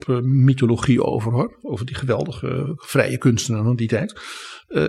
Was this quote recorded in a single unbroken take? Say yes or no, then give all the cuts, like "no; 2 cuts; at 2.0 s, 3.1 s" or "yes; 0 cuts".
yes; 0 cuts